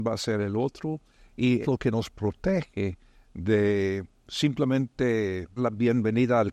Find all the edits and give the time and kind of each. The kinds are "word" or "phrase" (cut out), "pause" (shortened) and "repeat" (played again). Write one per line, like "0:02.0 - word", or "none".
0:01.6 - word
0:05.6 - word